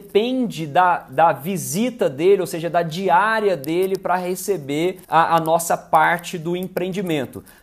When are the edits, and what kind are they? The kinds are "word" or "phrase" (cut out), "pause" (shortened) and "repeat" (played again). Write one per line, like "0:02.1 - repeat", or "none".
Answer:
0:05.0 - pause